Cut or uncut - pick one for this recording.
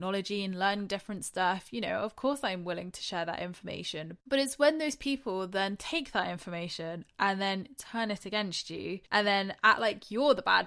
cut